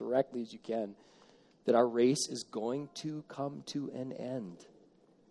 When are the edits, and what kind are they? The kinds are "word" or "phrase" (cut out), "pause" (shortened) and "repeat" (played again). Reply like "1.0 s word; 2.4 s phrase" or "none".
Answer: none